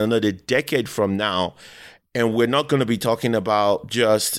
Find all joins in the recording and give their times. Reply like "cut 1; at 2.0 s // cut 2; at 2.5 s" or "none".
none